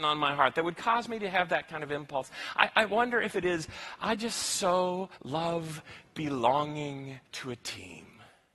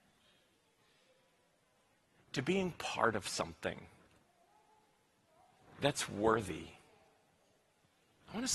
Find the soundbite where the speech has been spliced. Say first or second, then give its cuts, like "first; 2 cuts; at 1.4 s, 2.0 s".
first; 2 cuts; at 5.1 s, 7.2 s